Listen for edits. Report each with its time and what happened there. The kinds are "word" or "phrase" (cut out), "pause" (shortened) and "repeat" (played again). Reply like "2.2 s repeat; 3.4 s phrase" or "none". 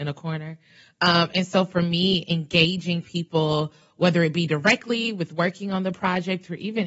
none